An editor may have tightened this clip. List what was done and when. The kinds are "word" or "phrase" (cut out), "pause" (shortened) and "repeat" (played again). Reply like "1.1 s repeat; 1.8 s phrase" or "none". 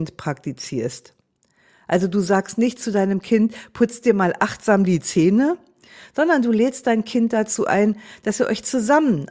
none